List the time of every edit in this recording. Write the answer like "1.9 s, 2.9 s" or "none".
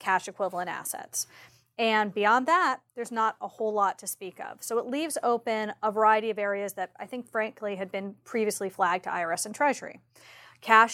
2.9 s